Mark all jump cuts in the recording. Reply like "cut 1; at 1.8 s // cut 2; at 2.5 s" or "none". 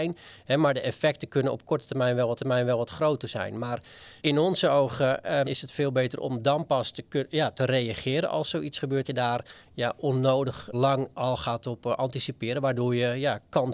cut 1; at 2.4 s // cut 2; at 4.2 s // cut 3; at 5.4 s // cut 4; at 9.0 s // cut 5; at 10.7 s

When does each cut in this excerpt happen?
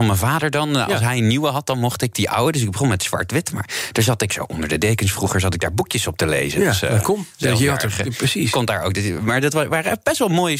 none

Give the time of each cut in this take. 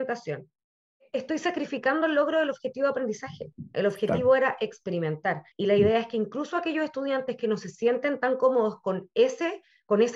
cut 1; at 5.5 s

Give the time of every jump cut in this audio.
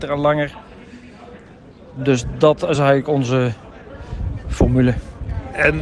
none

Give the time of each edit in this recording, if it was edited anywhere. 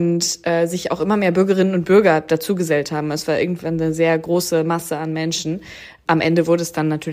none

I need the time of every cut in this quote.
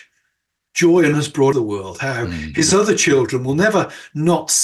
cut 1; at 1.1 s // cut 2; at 1.5 s

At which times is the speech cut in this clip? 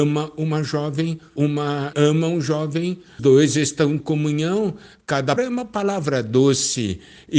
cut 1; at 1.4 s // cut 2; at 1.9 s // cut 3; at 3.2 s // cut 4; at 4.0 s // cut 5; at 5.4 s

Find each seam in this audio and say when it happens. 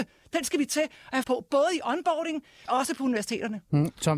cut 1; at 1.2 s // cut 2; at 2.7 s

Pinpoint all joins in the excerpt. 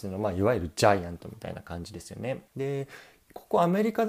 cut 1; at 2.5 s

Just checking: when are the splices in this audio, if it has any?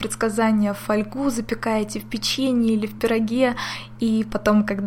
none

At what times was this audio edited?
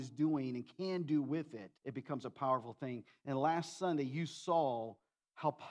cut 1; at 1.8 s

